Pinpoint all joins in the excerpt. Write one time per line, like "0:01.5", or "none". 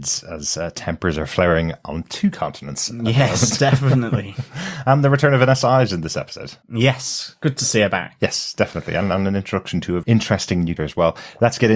0:06.6
0:10.0
0:10.8